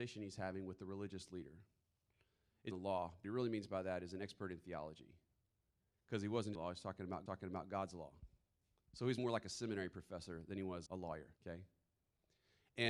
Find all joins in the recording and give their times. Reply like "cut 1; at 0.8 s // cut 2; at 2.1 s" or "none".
cut 1; at 2.7 s // cut 2; at 3.2 s // cut 3; at 6.5 s // cut 4; at 7.3 s // cut 5; at 9.2 s // cut 6; at 10.9 s // cut 7; at 11.4 s